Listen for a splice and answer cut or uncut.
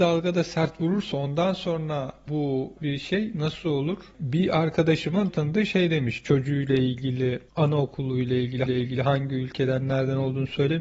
cut